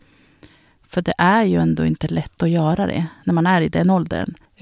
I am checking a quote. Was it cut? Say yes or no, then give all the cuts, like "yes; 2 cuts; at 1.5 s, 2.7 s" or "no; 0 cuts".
no; 0 cuts